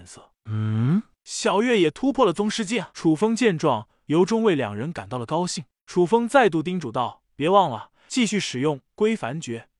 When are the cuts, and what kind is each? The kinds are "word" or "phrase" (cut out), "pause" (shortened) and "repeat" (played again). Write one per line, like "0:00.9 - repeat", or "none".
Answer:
0:02.9 - pause